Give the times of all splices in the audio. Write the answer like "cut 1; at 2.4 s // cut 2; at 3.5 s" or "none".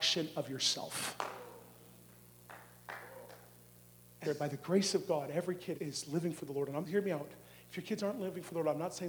cut 1; at 4.2 s // cut 2; at 5.7 s // cut 3; at 6.8 s